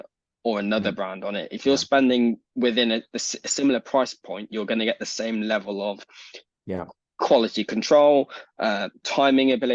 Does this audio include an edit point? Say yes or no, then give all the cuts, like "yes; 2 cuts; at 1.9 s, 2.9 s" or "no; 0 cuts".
no; 0 cuts